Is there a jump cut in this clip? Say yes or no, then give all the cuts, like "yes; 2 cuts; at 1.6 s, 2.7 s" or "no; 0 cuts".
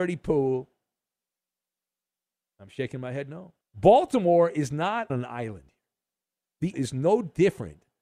yes; 3 cuts; at 3.6 s, 5.1 s, 6.7 s